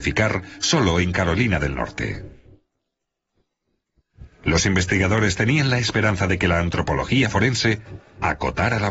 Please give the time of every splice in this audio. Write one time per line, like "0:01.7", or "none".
none